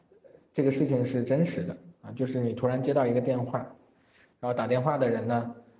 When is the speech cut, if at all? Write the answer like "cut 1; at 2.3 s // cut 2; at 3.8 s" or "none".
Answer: none